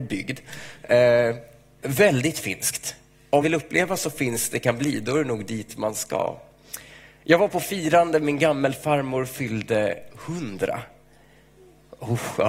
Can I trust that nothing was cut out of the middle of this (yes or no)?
no